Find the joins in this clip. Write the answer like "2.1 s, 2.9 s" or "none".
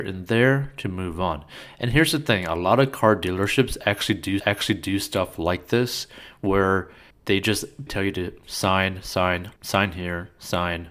4.4 s, 7.1 s, 7.9 s, 9.6 s